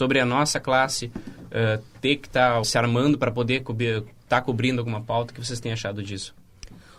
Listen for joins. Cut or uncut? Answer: cut